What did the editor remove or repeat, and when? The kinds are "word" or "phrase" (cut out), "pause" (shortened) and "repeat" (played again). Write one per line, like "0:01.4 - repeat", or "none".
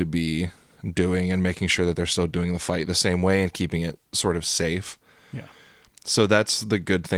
none